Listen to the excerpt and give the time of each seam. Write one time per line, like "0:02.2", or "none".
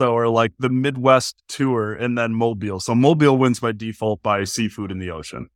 none